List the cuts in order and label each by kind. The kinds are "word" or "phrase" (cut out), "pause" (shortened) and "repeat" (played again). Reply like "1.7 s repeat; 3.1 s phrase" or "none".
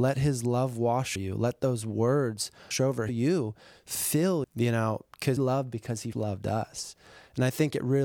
1.2 s word; 2.7 s word; 3.1 s word; 4.4 s word; 5.4 s word; 6.1 s word